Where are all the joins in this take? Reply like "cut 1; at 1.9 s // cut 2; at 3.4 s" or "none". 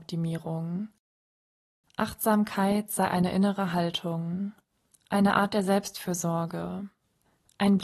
none